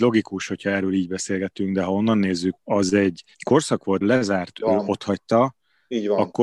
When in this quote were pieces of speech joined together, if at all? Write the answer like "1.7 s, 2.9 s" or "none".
2.6 s, 3.3 s, 4.0 s, 4.5 s